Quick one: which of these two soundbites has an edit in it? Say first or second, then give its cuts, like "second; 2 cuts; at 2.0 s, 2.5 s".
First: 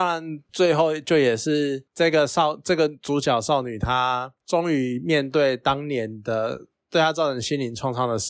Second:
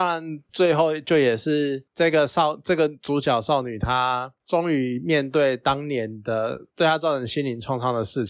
second; 1 cut; at 6.7 s